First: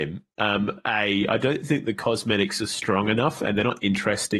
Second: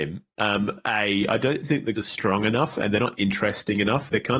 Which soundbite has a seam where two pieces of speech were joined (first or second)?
second